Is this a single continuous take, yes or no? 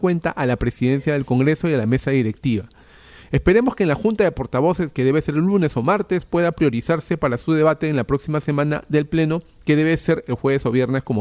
yes